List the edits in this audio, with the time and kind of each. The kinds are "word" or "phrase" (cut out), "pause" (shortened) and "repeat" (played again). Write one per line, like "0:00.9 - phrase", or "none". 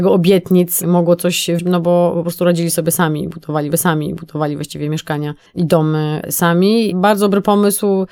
0:01.6 - word
0:03.7 - repeat
0:05.5 - pause
0:06.2 - word